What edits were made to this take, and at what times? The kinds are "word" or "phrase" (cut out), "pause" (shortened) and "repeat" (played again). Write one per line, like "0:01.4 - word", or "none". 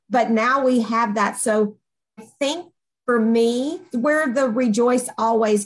0:02.2 - word
0:03.9 - word